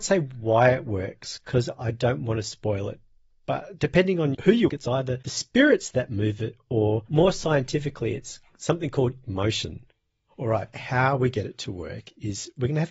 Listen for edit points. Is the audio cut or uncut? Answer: cut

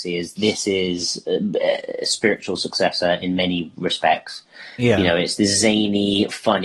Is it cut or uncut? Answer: uncut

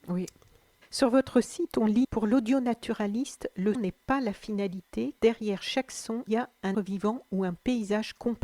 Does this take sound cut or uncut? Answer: cut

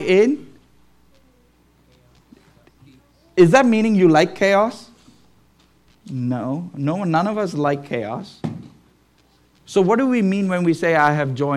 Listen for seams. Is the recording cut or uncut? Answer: uncut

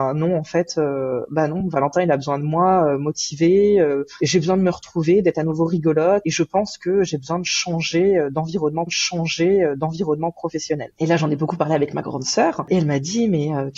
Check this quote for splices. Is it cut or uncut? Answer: cut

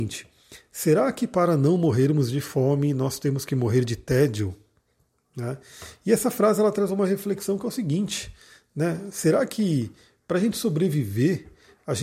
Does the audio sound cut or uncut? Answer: uncut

